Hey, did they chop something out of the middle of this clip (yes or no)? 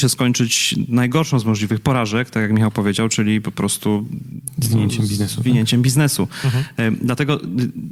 no